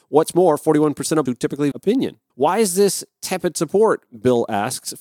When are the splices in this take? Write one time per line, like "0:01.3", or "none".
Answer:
0:01.3
0:01.7
0:02.3

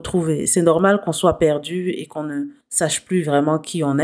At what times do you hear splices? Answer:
0:02.6

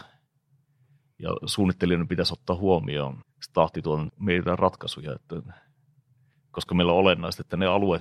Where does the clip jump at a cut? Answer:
0:03.2
0:04.1

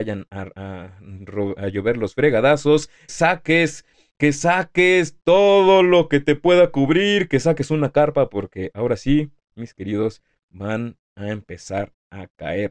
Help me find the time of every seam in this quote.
0:03.1

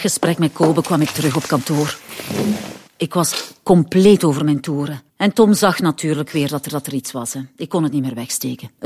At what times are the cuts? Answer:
0:02.9
0:05.1
0:06.7

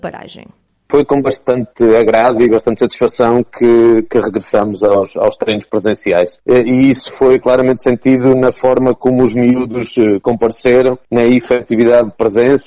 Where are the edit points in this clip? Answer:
none

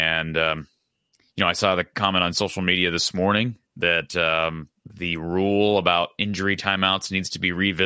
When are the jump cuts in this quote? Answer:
0:03.7
0:04.8

